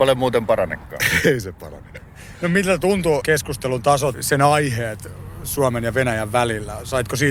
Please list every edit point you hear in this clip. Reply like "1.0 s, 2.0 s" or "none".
3.2 s, 4.1 s